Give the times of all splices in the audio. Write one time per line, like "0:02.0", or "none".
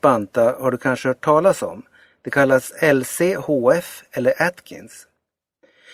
none